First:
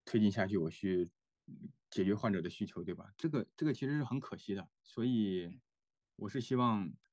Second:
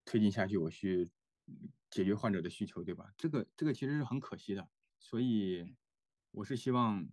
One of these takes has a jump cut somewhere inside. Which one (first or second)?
first